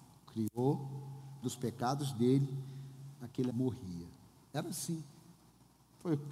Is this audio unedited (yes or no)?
no